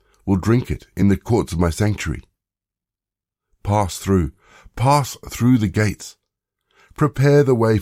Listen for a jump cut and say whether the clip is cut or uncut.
uncut